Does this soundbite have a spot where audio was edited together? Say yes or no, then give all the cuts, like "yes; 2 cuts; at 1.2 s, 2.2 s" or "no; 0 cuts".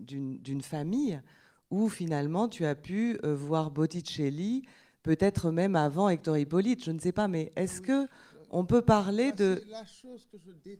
no; 0 cuts